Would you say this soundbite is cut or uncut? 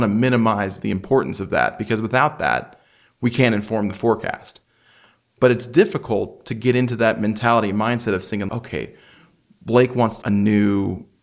cut